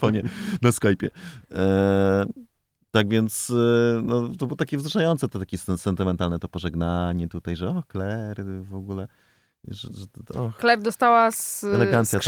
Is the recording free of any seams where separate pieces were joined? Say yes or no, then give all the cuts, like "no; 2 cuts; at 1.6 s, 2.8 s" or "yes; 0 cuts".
yes; 0 cuts